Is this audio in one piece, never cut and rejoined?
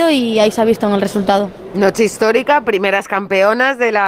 yes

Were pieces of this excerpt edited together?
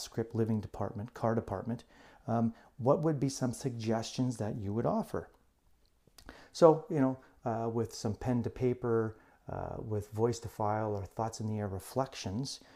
no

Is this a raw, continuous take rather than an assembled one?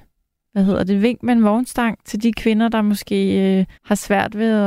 no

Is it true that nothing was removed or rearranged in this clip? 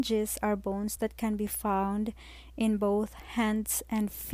yes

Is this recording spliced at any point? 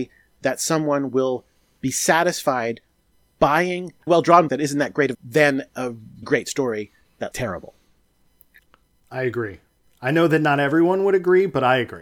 yes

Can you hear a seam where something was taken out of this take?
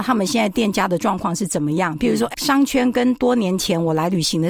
yes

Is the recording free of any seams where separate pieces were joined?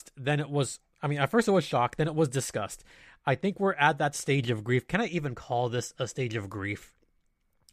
yes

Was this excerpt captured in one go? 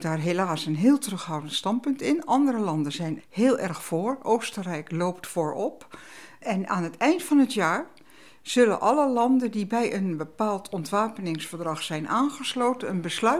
no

